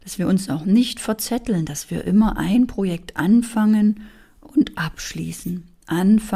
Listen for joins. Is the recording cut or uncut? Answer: uncut